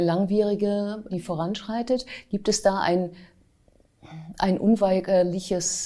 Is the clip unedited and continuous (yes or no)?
no